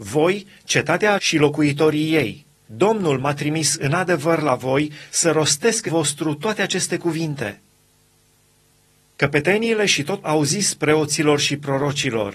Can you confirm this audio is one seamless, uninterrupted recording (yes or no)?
no